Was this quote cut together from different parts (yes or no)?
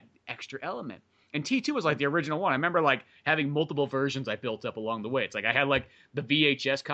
no